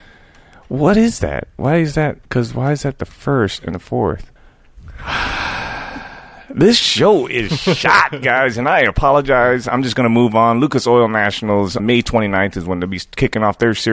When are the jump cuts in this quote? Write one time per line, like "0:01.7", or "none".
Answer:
0:02.3
0:03.7
0:04.4
0:11.8

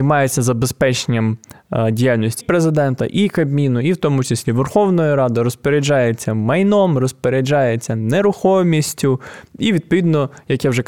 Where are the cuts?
0:02.4

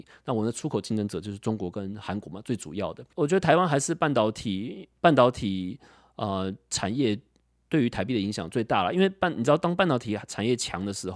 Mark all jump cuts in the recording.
none

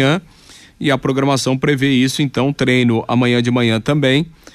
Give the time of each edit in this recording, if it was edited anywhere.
none

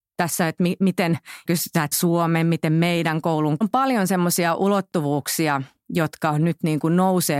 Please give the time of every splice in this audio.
0:01.5
0:01.9
0:03.6

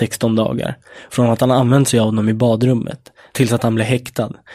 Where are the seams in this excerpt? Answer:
none

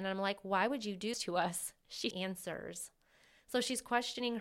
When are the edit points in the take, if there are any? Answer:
0:01.1
0:02.1

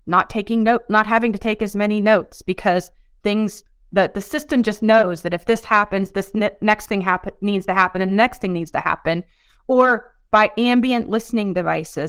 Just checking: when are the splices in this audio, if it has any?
none

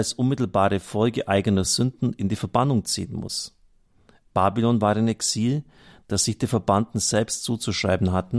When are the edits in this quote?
none

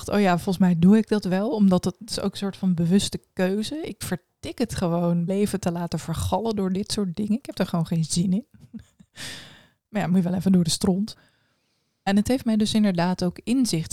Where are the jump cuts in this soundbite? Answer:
0:05.3

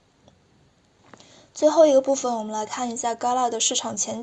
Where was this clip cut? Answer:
none

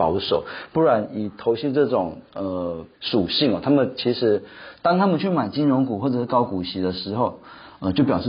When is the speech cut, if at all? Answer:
0:02.9

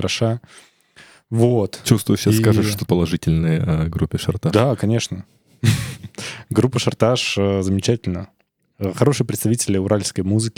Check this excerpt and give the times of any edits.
0:02.9

